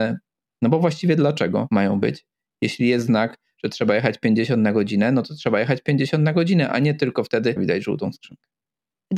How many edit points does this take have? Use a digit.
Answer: 1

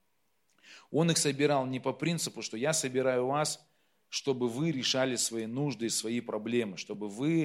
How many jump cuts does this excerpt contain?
0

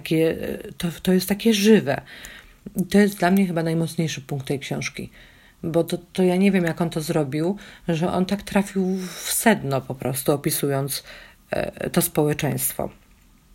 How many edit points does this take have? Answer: 0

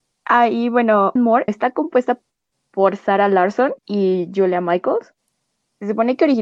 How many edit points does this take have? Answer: 3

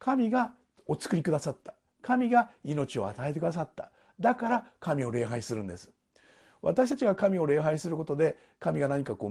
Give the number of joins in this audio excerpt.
0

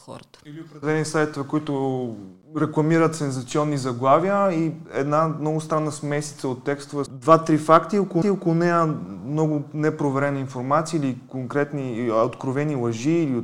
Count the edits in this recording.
2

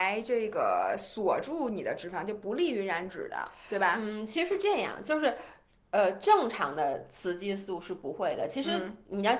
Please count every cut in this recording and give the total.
0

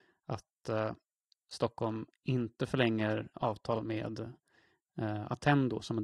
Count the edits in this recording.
1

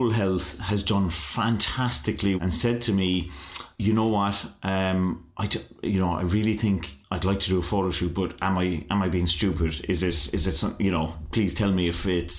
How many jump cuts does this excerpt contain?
3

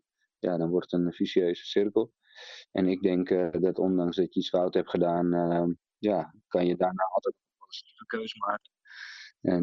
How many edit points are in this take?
0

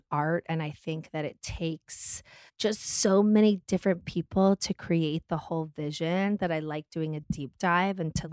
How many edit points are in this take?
0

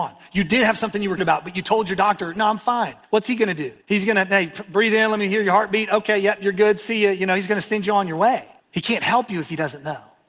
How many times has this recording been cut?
4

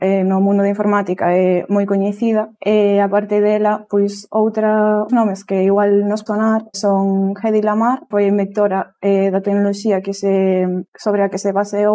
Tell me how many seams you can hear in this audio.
4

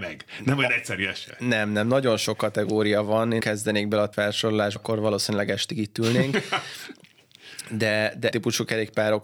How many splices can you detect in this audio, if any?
4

